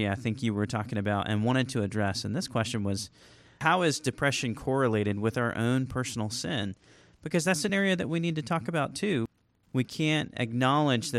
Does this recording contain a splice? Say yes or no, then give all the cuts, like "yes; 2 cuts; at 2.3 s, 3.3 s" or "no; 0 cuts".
no; 0 cuts